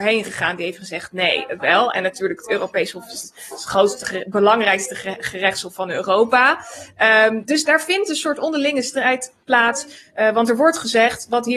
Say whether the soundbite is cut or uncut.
cut